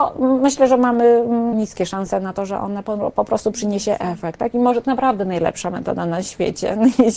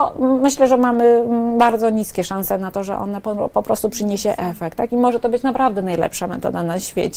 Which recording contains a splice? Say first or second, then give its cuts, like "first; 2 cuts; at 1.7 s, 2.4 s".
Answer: first; 2 cuts; at 1.5 s, 4.8 s